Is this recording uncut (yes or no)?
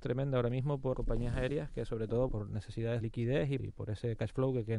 no